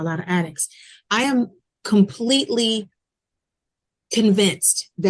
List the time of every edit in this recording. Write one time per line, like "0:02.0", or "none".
none